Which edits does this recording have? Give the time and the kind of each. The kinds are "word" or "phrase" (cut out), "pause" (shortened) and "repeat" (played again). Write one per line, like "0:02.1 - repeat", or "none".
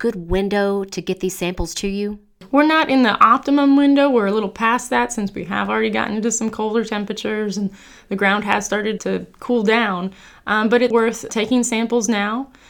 0:09.0 - word
0:10.9 - word
0:11.3 - word